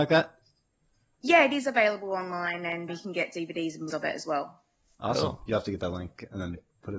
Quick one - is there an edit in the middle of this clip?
yes; 2 cuts; at 2.9 s, 3.9 s

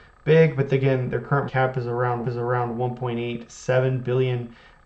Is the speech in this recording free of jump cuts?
no; 2 cuts; at 1.5 s, 2.2 s

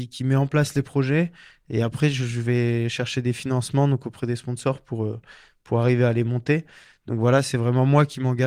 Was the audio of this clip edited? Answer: no; 0 cuts

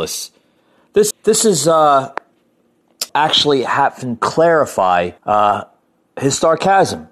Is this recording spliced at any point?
yes; 4 cuts; at 1.1 s, 3.1 s, 4.2 s, 5.2 s

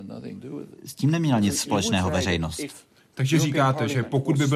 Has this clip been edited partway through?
no; 0 cuts

